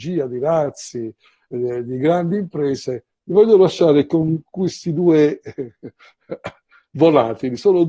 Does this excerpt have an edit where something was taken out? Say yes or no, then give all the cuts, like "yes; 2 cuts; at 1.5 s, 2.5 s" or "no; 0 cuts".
no; 0 cuts